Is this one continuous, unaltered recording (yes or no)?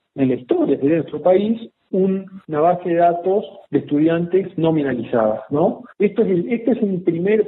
no